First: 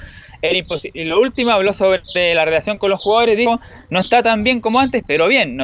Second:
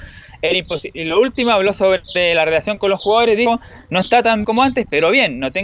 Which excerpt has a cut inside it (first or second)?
second